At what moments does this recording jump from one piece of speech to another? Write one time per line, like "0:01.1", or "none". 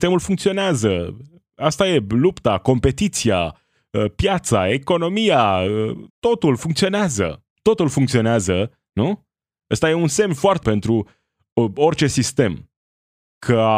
0:06.1
0:07.5
0:10.6